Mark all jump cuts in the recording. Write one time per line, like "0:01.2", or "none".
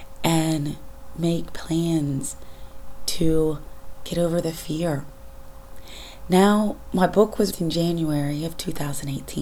0:07.5